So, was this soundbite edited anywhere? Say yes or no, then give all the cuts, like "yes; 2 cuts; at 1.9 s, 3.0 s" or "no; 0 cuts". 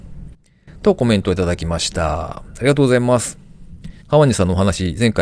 yes; 1 cut; at 4.0 s